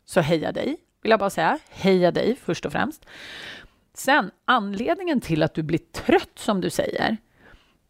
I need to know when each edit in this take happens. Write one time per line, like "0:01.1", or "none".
none